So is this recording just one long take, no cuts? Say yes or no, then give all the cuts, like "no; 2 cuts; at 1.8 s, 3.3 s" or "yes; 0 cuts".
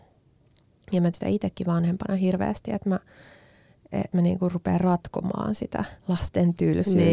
no; 3 cuts; at 1.1 s, 4.1 s, 6.0 s